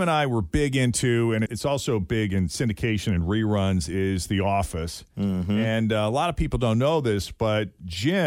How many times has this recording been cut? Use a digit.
1